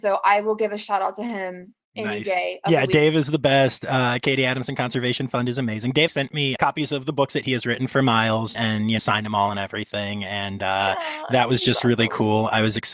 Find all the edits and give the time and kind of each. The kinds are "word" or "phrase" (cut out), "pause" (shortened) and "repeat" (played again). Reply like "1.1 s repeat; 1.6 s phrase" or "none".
6.1 s word; 6.6 s word; 8.5 s word; 9.0 s word

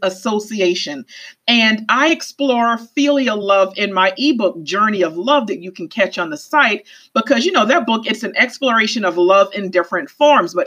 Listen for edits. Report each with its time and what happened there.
none

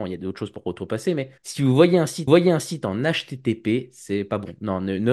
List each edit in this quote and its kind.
1.4 s pause; 2.3 s repeat

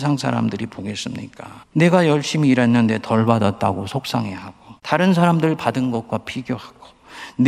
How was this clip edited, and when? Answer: 1.6 s pause; 4.8 s pause

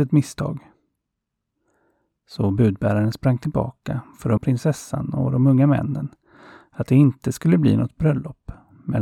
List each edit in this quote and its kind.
4.4 s word

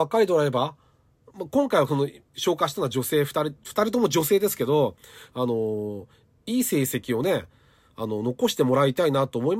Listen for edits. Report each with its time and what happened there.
none

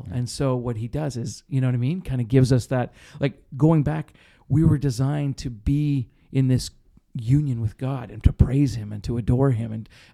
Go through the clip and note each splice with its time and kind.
none

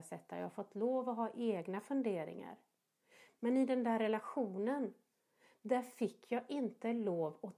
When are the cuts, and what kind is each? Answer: none

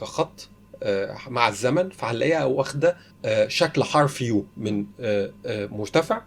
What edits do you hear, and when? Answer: 3.1 s pause; 4.5 s pause

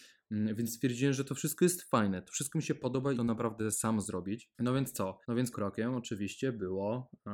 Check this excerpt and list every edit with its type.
3.1 s phrase; 4.5 s pause; 5.2 s pause; 5.5 s word

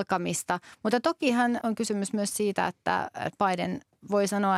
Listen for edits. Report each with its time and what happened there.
1.6 s word

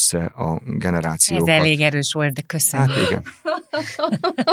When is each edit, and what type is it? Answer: 2.3 s word

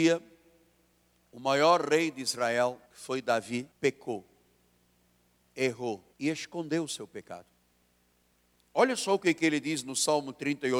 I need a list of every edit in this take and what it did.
2.9 s pause; 3.7 s pause; 6.1 s pause

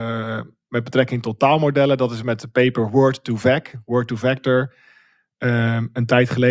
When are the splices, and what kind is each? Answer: none

